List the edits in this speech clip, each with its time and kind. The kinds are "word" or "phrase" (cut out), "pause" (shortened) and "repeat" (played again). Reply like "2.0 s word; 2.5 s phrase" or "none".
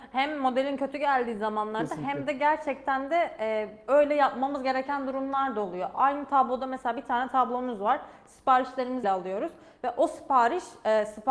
9.0 s word